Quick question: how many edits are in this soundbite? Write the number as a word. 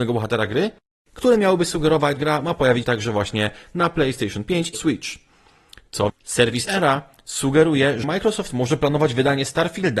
six